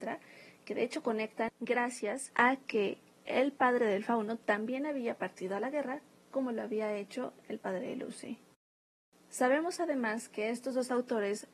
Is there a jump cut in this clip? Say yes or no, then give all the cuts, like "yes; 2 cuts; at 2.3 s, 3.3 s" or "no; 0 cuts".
no; 0 cuts